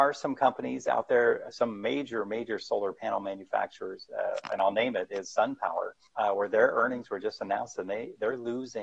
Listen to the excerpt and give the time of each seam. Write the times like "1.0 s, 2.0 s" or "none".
6.1 s